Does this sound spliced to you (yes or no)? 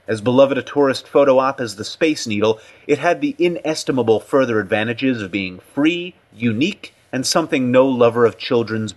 no